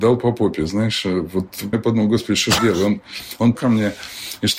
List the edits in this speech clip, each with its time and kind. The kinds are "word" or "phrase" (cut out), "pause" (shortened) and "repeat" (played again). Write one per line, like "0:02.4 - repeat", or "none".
0:01.7 - word
0:02.6 - word
0:03.5 - word